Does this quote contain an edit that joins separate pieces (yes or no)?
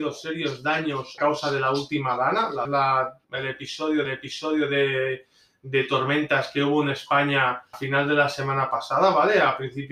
yes